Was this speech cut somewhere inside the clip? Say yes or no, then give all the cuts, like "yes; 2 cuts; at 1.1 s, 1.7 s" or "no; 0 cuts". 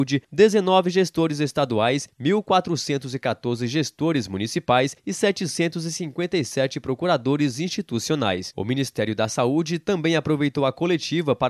no; 0 cuts